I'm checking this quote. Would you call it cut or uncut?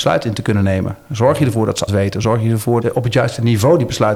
cut